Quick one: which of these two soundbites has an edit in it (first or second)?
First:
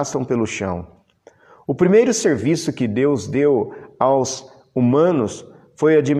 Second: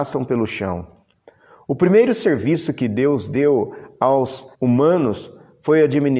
second